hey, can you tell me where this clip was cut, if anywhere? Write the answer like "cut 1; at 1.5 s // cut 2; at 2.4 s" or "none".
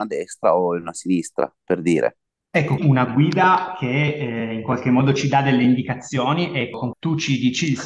cut 1; at 2.8 s // cut 2; at 6.9 s